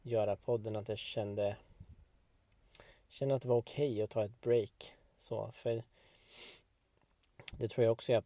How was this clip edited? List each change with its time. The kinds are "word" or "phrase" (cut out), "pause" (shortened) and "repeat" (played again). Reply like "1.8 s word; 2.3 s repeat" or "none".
none